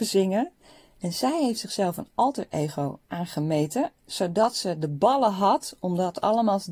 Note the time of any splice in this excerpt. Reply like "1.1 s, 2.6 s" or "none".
3.0 s

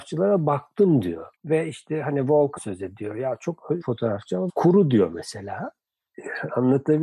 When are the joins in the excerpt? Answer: 1.3 s, 2.6 s, 3.8 s, 4.5 s

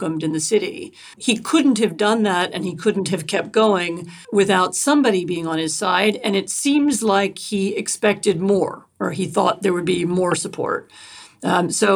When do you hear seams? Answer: 1.1 s, 4.2 s

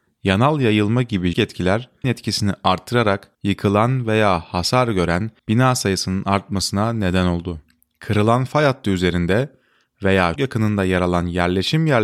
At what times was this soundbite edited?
1.3 s, 2.0 s, 3.3 s, 5.4 s, 7.8 s, 10.4 s

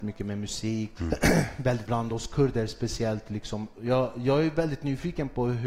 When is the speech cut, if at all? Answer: 1.0 s, 1.9 s

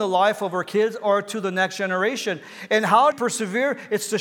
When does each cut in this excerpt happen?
3.1 s

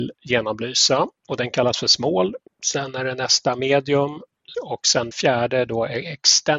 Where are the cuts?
1.2 s, 2.5 s, 4.5 s, 5.1 s

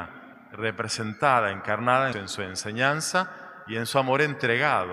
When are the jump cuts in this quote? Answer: 2.1 s

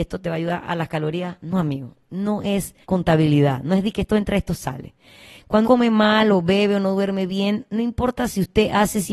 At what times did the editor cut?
2.8 s, 5.6 s

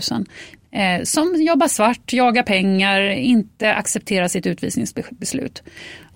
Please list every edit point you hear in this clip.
none

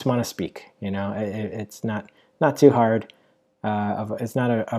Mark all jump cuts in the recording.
none

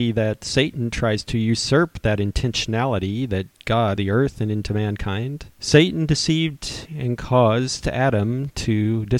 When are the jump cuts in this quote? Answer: 4.0 s, 5.5 s, 6.8 s

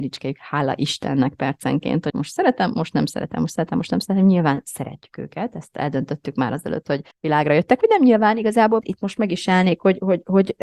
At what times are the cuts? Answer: 2.1 s, 7.1 s, 8.8 s

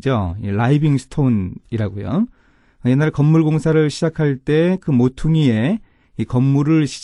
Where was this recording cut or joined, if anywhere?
none

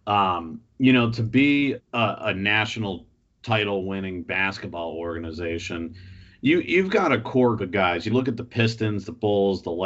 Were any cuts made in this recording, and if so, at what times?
1.8 s, 7.6 s, 8.1 s

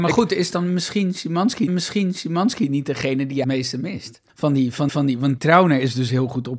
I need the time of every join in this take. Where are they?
1.7 s, 3.4 s, 4.3 s, 4.9 s, 5.4 s

